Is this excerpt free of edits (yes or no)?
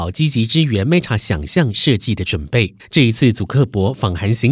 no